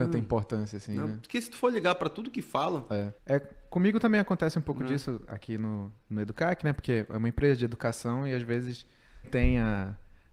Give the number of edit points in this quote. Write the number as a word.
three